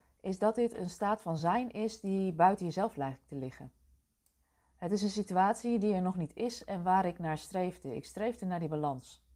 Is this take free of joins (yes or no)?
yes